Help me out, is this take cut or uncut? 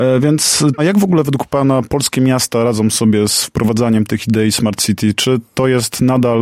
uncut